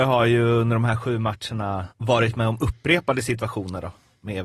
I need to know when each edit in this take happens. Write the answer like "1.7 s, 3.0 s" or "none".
1.9 s